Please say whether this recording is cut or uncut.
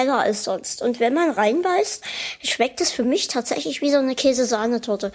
uncut